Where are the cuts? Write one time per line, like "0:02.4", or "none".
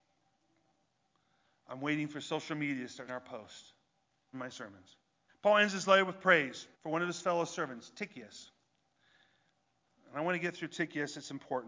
0:03.1
0:04.3
0:05.3
0:06.7